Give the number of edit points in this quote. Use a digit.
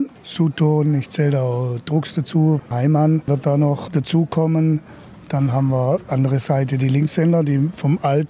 0